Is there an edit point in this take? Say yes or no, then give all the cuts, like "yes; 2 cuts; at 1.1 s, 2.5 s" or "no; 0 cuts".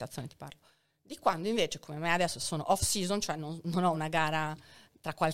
no; 0 cuts